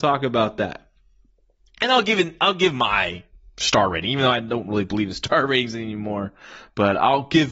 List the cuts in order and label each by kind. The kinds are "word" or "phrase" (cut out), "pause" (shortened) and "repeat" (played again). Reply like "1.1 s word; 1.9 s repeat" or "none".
none